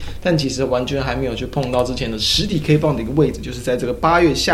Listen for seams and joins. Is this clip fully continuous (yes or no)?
yes